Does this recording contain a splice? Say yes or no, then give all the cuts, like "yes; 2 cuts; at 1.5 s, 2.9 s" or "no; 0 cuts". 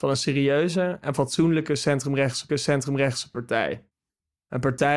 yes; 1 cut; at 2.5 s